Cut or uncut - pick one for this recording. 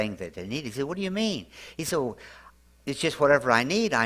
cut